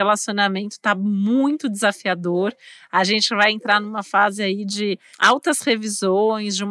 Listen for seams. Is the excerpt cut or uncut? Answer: cut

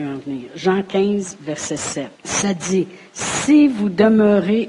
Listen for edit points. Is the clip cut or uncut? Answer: cut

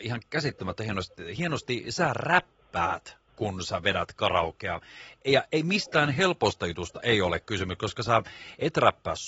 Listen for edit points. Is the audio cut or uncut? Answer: cut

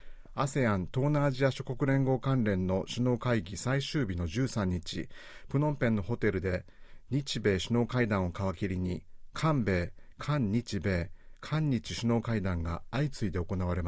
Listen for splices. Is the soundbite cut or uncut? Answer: uncut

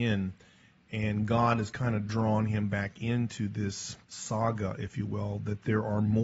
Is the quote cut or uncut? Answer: cut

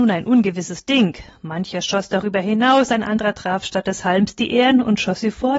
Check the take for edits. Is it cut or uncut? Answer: uncut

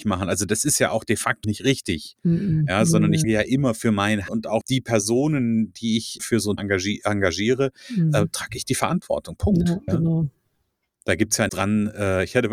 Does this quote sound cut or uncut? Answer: cut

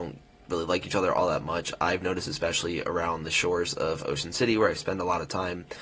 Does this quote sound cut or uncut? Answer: uncut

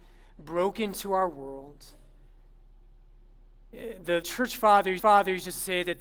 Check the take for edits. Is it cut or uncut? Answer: cut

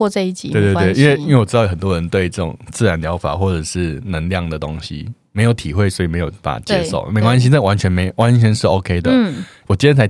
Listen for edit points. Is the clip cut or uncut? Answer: uncut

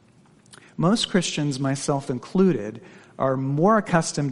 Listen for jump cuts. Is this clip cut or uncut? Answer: uncut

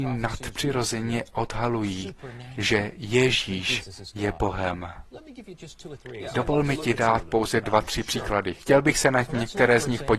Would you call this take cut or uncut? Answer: uncut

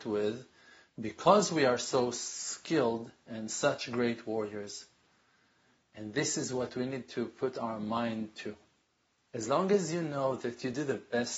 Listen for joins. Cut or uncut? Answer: uncut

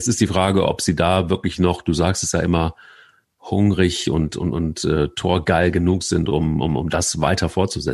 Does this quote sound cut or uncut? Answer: uncut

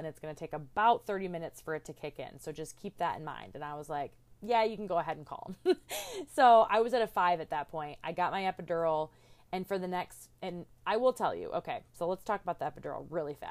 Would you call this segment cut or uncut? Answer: uncut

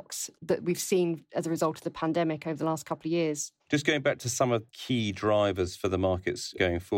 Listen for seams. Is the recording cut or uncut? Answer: cut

